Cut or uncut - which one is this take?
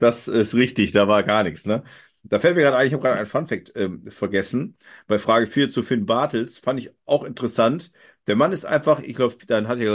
uncut